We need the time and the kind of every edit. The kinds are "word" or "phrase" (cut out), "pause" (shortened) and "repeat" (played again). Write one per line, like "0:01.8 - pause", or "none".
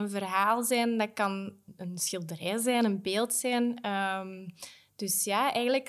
none